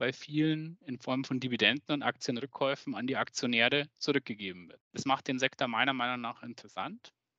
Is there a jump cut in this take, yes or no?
no